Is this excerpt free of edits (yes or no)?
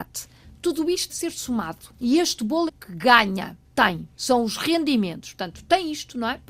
no